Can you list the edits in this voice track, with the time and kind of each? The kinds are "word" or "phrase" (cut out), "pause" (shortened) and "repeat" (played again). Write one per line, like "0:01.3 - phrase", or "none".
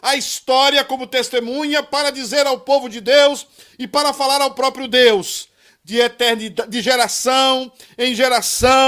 none